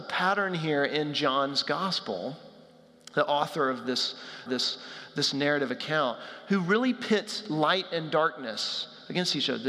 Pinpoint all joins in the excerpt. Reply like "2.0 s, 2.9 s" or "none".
4.5 s

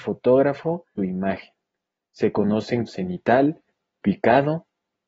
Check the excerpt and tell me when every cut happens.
1.0 s, 2.9 s

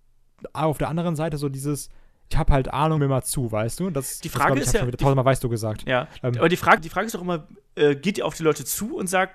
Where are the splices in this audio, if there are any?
2.3 s, 3.0 s, 4.2 s, 6.8 s

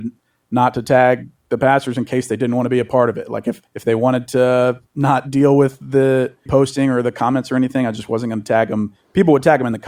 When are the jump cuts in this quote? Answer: 3.7 s, 4.9 s, 6.5 s

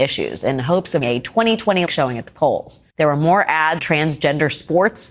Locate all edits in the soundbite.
1.0 s, 1.9 s, 2.9 s, 3.8 s

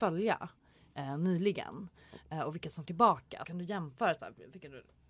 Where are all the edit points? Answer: 2.9 s, 3.4 s

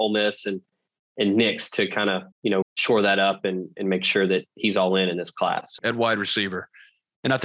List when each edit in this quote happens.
2.3 s, 2.6 s, 5.8 s

